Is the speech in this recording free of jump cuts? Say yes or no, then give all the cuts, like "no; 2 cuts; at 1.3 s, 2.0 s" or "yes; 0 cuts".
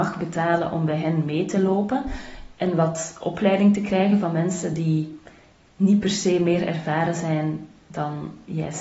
yes; 0 cuts